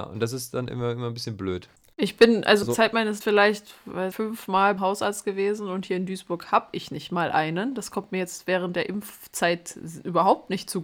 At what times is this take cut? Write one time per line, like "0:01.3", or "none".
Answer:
0:02.6
0:03.2
0:04.1
0:04.8